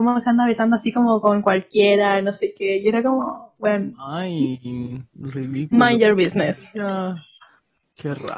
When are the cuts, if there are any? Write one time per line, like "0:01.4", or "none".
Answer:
none